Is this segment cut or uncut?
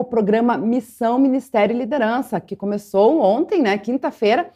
uncut